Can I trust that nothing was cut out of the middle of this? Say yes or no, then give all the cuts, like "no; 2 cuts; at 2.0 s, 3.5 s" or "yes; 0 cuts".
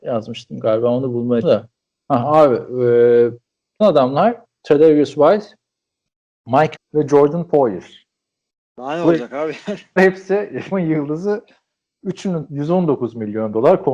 no; 6 cuts; at 1.4 s, 3.8 s, 6.8 s, 10.0 s, 10.7 s, 12.5 s